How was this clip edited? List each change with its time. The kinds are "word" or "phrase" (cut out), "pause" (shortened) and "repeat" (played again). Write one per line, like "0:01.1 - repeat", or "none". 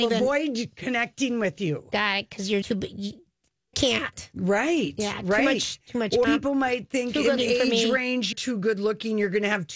0:02.6 - word
0:03.7 - word
0:06.2 - word
0:07.4 - word
0:08.3 - word